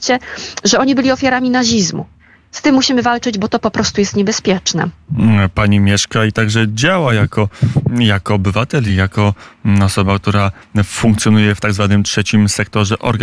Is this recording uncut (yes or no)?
yes